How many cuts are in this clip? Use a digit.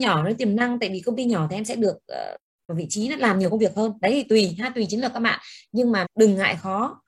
2